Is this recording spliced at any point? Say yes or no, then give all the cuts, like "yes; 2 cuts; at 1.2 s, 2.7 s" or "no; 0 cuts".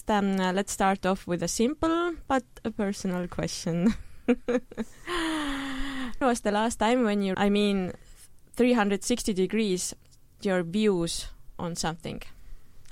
yes; 3 cuts; at 6.2 s, 7.3 s, 10.4 s